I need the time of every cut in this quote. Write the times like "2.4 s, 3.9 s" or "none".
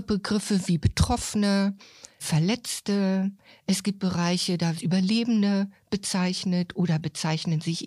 2.2 s, 4.7 s